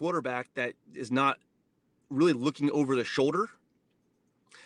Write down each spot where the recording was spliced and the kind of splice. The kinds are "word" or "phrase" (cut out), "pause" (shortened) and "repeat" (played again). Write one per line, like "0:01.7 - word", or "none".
none

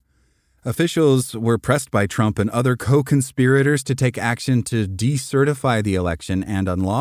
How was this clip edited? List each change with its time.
none

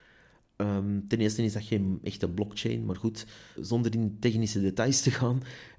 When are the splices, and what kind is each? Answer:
0:03.6 - word

